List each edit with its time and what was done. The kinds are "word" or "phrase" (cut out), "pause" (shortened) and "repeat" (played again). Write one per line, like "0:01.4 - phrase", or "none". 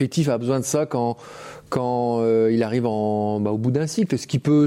none